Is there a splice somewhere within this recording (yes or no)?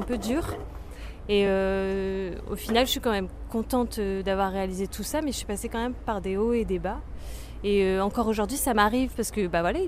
no